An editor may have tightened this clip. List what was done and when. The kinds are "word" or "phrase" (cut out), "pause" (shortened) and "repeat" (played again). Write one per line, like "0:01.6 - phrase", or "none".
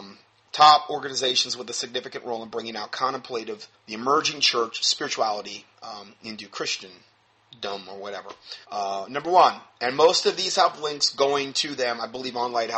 0:03.7 - pause
0:05.7 - pause
0:08.6 - pause